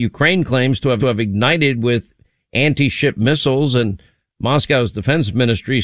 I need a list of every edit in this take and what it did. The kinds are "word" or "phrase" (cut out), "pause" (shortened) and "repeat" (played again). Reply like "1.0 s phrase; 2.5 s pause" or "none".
1.0 s repeat